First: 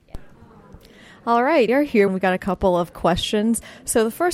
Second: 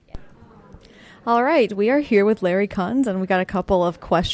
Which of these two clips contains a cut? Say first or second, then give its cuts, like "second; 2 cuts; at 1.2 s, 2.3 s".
first; 2 cuts; at 1.7 s, 2.1 s